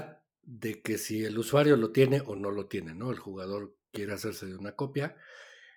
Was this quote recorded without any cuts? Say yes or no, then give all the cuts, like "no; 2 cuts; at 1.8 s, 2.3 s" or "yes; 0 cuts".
yes; 0 cuts